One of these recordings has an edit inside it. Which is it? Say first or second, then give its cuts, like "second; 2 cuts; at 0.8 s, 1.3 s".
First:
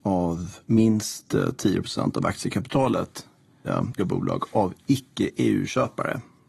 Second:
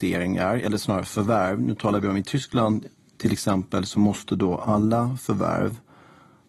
first; 2 cuts; at 3.6 s, 4.0 s